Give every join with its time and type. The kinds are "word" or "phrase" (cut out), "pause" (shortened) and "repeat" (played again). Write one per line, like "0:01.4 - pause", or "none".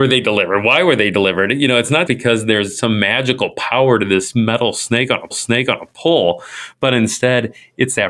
0:02.1 - word
0:05.3 - repeat